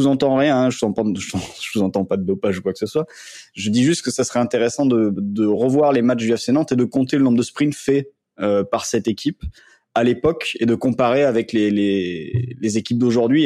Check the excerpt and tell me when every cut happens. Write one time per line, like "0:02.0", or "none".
none